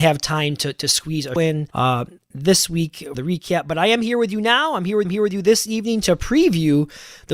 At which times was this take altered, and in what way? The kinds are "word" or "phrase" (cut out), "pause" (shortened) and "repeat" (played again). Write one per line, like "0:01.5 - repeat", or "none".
0:01.4 - word
0:01.7 - pause
0:03.1 - word
0:05.0 - repeat